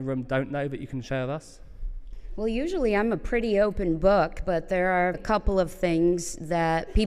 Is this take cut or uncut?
cut